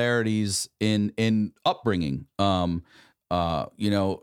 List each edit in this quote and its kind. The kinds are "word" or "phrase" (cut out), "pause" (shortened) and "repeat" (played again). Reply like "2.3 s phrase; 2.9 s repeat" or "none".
none